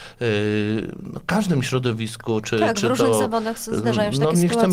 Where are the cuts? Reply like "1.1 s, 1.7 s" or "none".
none